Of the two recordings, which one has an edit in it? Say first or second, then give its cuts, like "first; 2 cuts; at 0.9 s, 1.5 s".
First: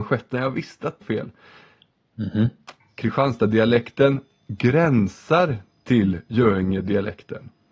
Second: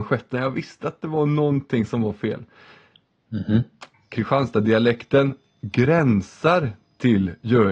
first; 1 cut; at 1.0 s